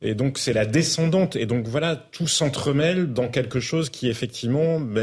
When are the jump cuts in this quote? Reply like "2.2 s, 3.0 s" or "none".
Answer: none